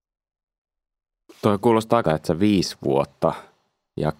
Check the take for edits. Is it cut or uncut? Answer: cut